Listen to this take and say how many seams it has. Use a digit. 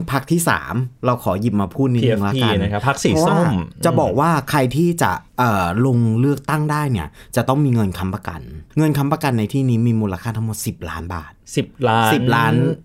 2